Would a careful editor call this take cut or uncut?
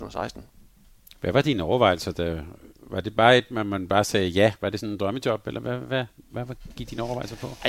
uncut